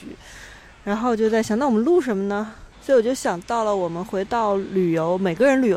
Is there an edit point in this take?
yes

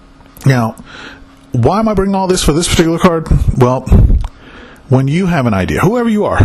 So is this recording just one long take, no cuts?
yes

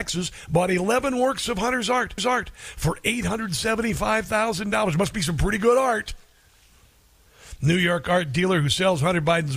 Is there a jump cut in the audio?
yes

